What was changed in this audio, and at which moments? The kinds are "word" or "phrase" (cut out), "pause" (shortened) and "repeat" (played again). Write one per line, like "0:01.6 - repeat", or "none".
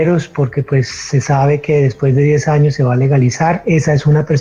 none